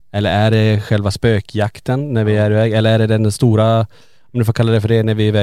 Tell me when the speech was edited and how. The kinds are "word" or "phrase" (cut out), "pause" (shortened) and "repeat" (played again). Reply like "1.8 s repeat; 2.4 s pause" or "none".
none